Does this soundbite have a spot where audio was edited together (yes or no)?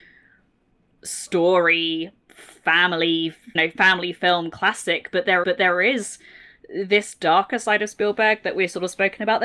yes